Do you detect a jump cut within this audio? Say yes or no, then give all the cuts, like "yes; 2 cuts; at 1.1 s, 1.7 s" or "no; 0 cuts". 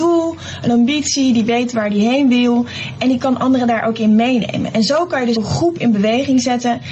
yes; 1 cut; at 5.4 s